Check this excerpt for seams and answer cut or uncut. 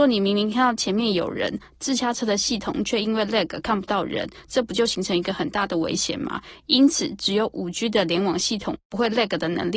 uncut